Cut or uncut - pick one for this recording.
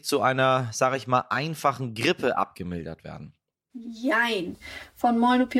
uncut